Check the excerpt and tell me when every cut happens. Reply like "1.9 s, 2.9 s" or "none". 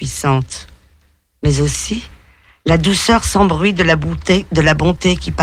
none